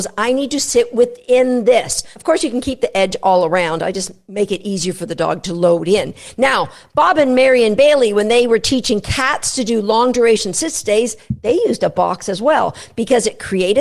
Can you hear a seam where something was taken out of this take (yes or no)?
no